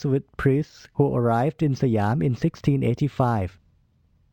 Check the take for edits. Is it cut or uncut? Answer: uncut